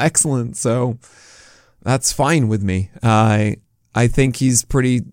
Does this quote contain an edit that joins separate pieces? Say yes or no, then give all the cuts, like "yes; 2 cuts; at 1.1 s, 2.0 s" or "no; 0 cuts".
no; 0 cuts